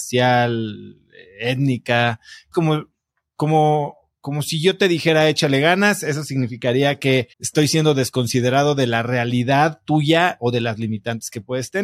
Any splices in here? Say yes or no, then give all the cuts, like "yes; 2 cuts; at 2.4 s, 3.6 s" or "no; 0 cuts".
yes; 2 cuts; at 2.5 s, 7.3 s